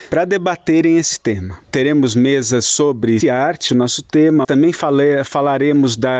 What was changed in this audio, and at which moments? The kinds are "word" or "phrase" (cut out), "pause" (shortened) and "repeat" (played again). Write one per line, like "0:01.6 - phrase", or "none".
0:01.6 - pause
0:03.2 - word
0:03.7 - word
0:04.4 - word

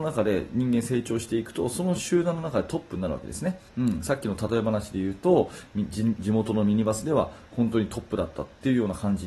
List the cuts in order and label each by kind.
0:03.7 - pause

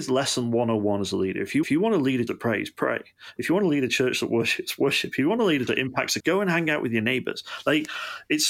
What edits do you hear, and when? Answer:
0:01.6 - repeat
0:02.3 - word
0:05.7 - word
0:06.2 - word

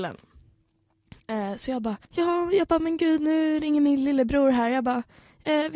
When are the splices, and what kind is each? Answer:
0:02.0 - pause

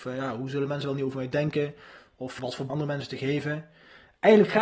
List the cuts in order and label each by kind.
0:02.4 - word
0:02.7 - phrase

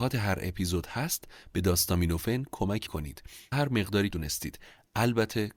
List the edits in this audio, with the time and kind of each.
0:02.9 - word
0:03.5 - word
0:04.1 - phrase

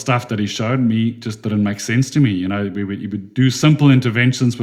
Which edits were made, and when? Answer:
none

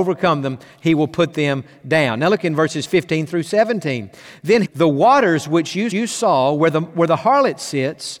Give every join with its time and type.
0:04.6 - phrase
0:05.9 - repeat

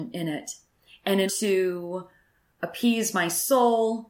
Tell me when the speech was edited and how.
0:01.3 - word

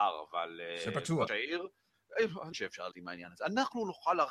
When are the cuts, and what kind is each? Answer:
0:01.3 - word
0:02.5 - word
0:02.9 - word

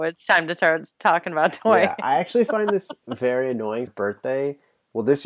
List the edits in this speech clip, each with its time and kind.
0:03.9 - phrase

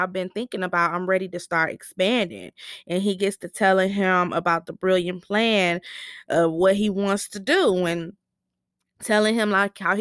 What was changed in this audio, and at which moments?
none

